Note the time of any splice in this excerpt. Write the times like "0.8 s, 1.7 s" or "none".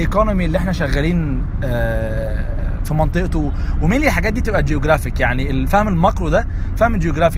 none

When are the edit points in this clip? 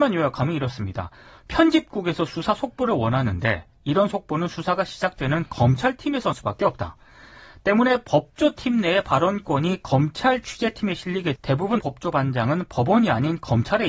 6.3 s, 11.4 s, 11.8 s

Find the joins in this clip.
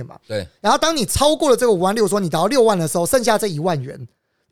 none

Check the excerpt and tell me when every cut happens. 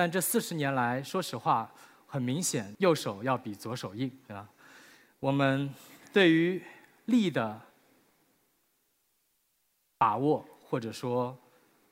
none

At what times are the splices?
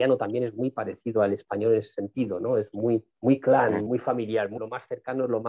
3.1 s, 3.9 s, 4.6 s

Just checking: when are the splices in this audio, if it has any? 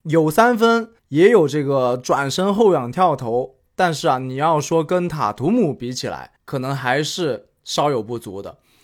1.0 s, 6.4 s

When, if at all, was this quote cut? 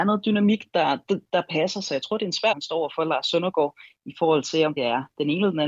2.5 s, 4.8 s

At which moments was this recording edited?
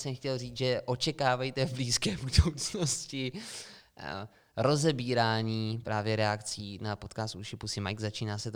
none

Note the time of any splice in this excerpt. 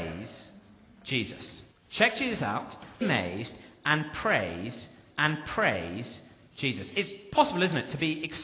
1.7 s, 3.0 s, 5.1 s

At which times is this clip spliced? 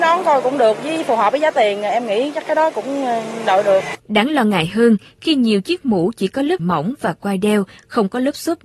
4.0 s, 6.6 s

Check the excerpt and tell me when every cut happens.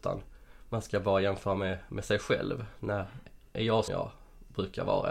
3.9 s

